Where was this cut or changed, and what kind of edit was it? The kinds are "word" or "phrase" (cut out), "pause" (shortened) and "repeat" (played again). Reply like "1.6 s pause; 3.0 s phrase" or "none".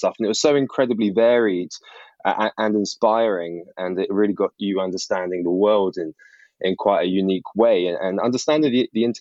none